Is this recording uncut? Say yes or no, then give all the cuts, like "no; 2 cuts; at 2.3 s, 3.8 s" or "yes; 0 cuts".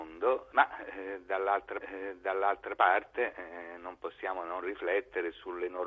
no; 1 cut; at 1.8 s